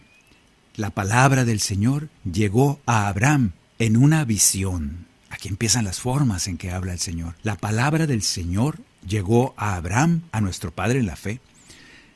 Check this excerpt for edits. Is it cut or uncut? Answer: cut